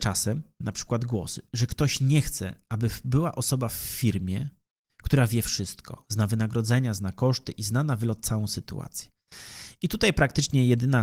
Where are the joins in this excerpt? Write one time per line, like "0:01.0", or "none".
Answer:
none